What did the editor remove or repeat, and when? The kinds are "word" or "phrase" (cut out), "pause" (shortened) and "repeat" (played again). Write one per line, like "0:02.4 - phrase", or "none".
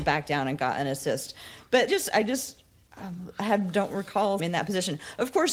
0:01.9 - word
0:04.4 - phrase